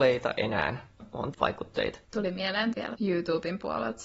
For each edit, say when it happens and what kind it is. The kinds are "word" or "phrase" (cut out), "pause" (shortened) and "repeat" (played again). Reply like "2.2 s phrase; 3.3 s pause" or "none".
1.0 s word; 1.3 s word; 2.0 s pause; 2.7 s word